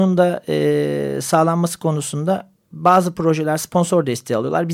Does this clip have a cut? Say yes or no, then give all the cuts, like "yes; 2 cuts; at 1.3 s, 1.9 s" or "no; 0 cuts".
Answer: no; 0 cuts